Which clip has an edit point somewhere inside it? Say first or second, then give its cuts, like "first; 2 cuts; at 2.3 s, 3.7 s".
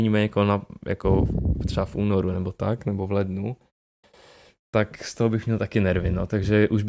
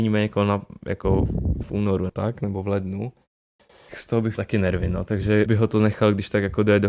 second; 5 cuts; at 1.6 s, 2.1 s, 3.9 s, 4.4 s, 5.5 s